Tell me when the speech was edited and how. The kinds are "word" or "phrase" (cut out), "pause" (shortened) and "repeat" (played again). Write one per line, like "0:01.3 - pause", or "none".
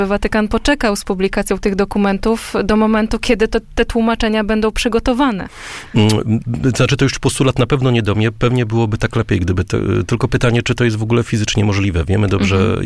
none